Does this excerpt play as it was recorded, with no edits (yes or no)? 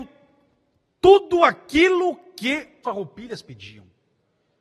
no